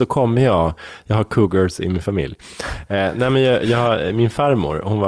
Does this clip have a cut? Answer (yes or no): no